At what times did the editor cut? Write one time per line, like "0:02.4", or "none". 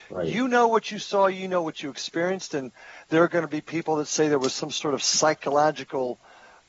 none